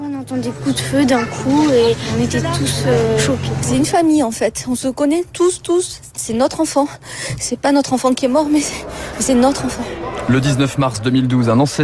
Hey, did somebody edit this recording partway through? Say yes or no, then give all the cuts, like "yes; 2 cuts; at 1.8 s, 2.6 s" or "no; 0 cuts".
no; 0 cuts